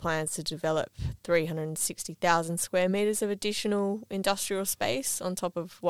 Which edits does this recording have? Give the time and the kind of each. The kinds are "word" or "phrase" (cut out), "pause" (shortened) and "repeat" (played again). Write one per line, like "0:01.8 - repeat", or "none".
none